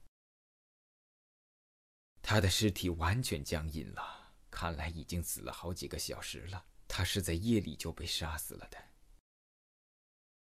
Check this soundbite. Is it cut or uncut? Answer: cut